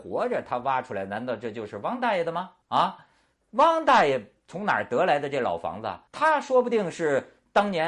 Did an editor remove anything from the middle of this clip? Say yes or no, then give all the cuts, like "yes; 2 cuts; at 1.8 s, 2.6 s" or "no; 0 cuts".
yes; 2 cuts; at 2.6 s, 6.1 s